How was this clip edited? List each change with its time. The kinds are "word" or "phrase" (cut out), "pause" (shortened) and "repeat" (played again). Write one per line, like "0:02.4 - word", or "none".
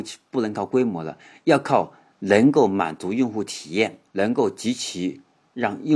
0:04.1 - pause